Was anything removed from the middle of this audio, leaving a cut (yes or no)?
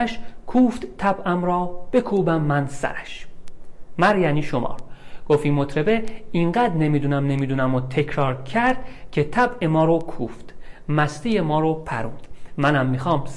no